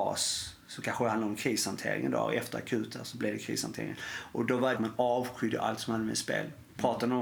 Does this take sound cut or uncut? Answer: cut